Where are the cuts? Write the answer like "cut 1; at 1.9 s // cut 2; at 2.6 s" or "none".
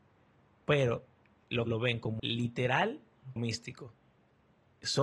cut 1; at 1.7 s // cut 2; at 2.2 s // cut 3; at 3.4 s